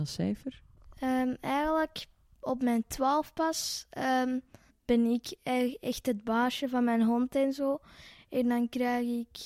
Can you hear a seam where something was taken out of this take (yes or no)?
no